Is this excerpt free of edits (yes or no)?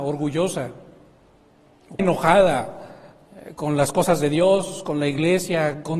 no